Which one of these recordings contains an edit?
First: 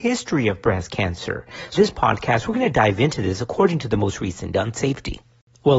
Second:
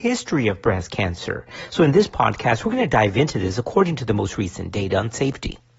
first; 2 cuts; at 1.8 s, 4.5 s

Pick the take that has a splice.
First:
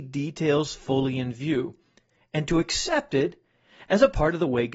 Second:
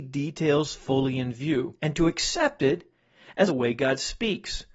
second; 2 cuts; at 1.8 s, 3.5 s

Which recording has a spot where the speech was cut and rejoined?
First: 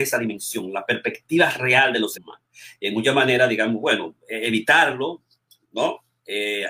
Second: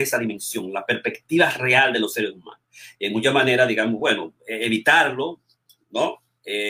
first; 1 cut; at 2.1 s

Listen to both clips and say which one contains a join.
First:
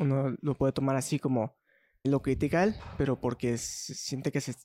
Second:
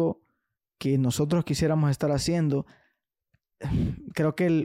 first; 1 cut; at 2.0 s

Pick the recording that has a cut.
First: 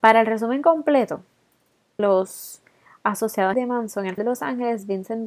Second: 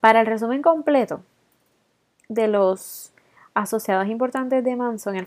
first; 3 cuts; at 2.0 s, 3.5 s, 4.2 s

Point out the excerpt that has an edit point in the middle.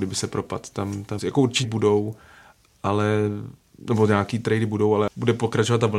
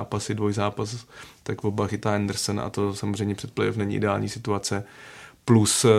first; 3 cuts; at 1.2 s, 1.6 s, 3.6 s

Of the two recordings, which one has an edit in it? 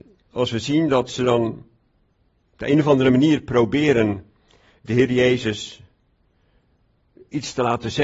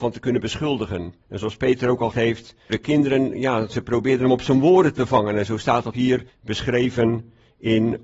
second; 5 cuts; at 1.2 s, 2.1 s, 2.7 s, 5.9 s, 6.3 s

